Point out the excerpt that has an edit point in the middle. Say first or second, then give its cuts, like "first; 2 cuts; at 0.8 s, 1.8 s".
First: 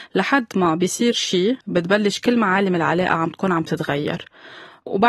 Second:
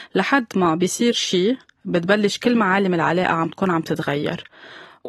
first; 1 cut; at 1.6 s